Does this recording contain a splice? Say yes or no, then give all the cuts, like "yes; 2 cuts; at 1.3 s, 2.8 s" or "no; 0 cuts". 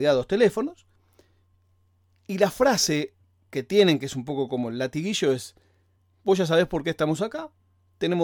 no; 0 cuts